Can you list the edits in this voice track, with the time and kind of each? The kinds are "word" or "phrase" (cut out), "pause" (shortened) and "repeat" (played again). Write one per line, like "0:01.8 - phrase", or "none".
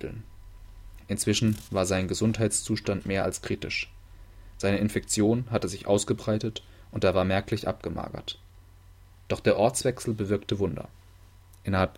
none

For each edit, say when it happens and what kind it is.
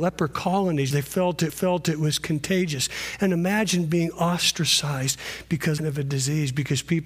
0:00.9 - word
0:01.5 - repeat
0:05.8 - phrase

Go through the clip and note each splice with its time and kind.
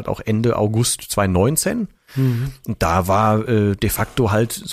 none

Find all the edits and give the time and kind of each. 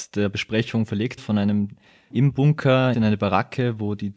0:01.2 - word
0:02.1 - word
0:02.9 - word

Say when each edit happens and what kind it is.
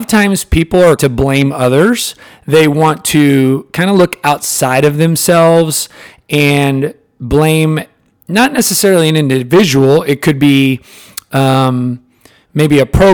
0:01.0 - phrase

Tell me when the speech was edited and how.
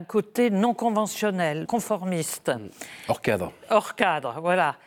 0:01.6 - word

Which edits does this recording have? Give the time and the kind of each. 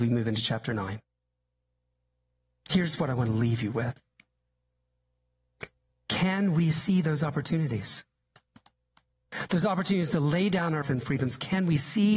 0:10.8 - word

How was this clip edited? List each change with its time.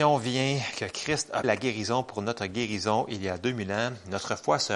0:01.4 - word

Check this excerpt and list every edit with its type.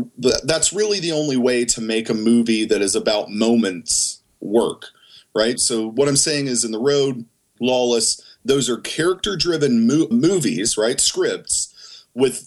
0:05.6 - word
0:07.6 - word
0:10.1 - word

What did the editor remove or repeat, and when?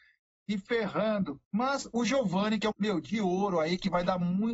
0:01.4 - pause
0:02.7 - word

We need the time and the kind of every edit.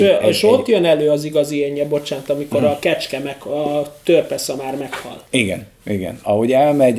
0:05.3 - pause

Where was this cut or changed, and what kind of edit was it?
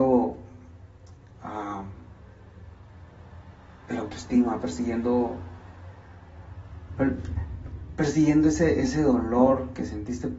none

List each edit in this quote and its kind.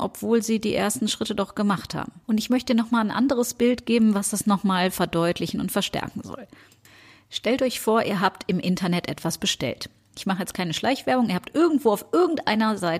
0:02.2 - pause

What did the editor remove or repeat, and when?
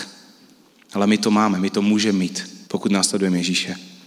0:02.7 - pause

